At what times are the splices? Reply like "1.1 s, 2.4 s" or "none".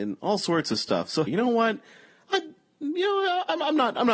1.3 s